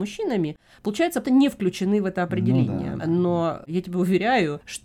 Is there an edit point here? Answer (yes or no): yes